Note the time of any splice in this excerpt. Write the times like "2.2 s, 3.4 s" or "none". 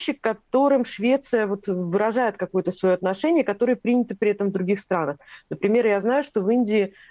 none